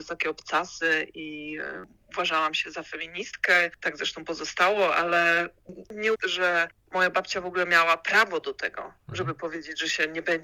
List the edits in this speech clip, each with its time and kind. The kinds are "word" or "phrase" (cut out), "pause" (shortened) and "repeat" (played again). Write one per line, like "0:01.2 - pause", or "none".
0:06.2 - word
0:09.0 - pause